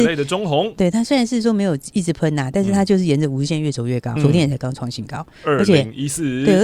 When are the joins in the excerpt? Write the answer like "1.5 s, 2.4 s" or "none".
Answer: 4.2 s